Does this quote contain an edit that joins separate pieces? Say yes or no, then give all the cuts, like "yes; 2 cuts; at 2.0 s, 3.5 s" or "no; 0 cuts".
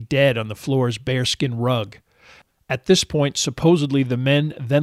no; 0 cuts